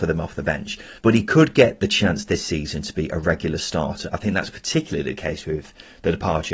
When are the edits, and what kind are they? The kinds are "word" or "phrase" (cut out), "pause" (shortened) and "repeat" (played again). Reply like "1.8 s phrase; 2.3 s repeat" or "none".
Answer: 1.0 s pause